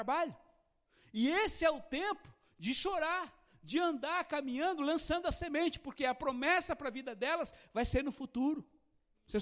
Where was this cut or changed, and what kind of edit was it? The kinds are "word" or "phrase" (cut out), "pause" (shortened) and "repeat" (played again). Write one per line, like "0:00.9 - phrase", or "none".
none